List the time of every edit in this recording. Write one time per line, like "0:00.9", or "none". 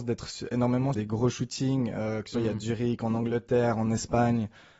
0:00.9
0:02.3